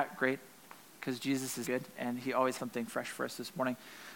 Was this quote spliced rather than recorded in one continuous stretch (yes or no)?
yes